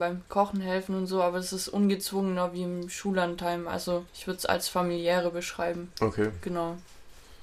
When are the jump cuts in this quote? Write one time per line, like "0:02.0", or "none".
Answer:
0:04.1